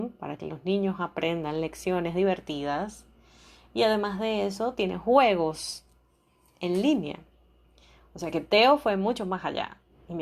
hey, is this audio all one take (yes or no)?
yes